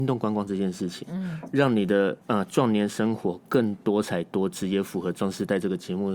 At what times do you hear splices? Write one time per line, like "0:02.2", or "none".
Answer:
0:02.2